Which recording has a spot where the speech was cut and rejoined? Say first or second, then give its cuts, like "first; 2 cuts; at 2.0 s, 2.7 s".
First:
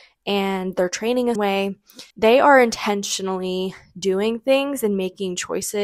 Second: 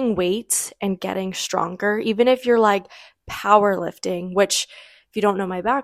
first; 2 cuts; at 1.4 s, 2.1 s